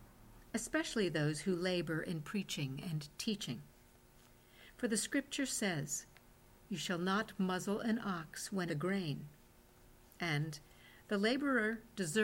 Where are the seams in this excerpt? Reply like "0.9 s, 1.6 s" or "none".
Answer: 8.7 s